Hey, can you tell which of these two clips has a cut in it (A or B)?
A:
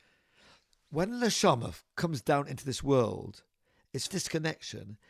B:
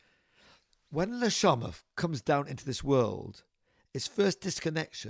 A